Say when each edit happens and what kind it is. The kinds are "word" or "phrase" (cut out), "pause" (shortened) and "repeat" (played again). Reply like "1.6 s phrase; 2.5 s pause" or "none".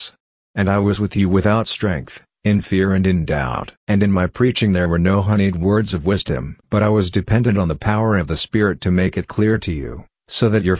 3.8 s pause; 6.6 s pause